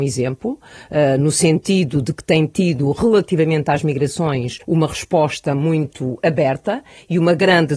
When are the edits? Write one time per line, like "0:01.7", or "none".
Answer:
0:04.6